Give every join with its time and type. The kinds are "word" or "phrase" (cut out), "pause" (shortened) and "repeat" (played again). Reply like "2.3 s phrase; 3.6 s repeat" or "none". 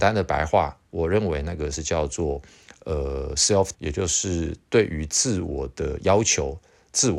3.7 s word